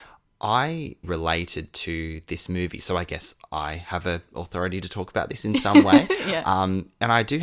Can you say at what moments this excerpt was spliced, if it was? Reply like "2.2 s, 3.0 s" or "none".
1.0 s